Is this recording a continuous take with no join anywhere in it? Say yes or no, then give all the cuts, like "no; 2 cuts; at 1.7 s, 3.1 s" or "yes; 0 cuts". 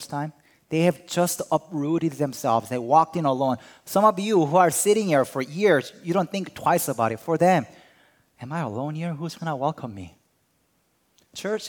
yes; 0 cuts